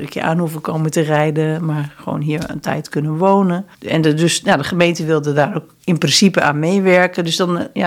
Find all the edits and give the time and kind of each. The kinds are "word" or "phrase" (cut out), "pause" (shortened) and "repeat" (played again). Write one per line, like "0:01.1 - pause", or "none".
0:03.7 - pause